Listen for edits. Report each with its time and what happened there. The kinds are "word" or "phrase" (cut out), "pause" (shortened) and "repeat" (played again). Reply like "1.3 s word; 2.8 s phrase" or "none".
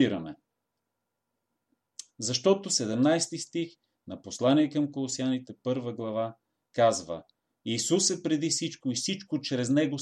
none